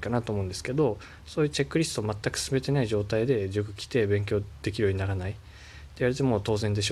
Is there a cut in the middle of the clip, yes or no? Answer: no